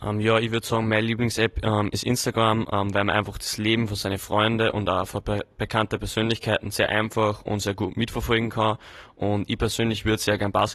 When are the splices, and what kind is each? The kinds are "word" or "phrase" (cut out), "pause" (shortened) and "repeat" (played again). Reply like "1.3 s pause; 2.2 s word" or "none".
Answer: none